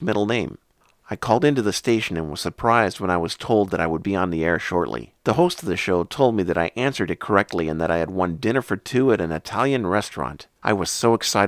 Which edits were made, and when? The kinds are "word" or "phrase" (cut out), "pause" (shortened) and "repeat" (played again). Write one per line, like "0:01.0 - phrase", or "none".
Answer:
0:05.2 - pause
0:10.6 - pause